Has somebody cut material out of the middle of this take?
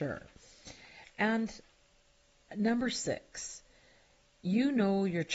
no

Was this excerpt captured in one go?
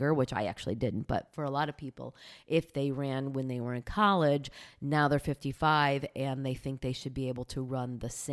yes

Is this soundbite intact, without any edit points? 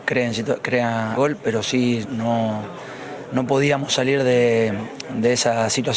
no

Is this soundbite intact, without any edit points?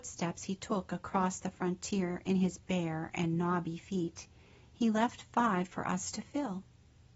yes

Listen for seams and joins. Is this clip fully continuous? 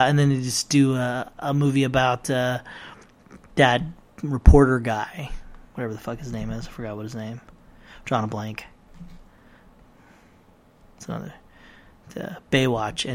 yes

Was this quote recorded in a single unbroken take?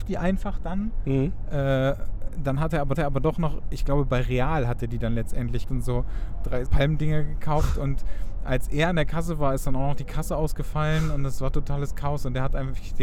no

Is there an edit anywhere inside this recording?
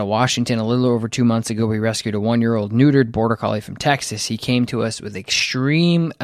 no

